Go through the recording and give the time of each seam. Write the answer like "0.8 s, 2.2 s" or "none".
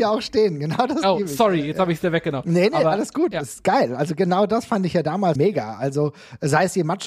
5.4 s